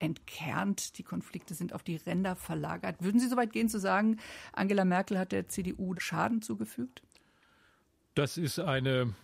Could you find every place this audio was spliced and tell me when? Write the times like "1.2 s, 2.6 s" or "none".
6.0 s